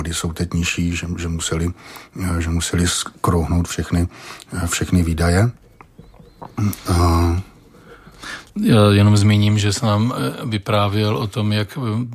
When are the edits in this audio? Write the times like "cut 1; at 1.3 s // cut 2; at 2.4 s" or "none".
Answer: cut 1; at 8.5 s